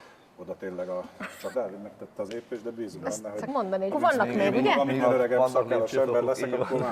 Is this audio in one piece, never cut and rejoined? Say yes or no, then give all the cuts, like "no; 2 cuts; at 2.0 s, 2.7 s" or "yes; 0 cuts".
no; 5 cuts; at 1.5 s, 2.3 s, 3.5 s, 3.9 s, 5.0 s